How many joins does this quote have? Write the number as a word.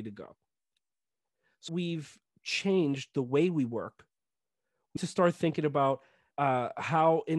three